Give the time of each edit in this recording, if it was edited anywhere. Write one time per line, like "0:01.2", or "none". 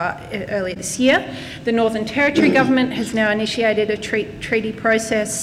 none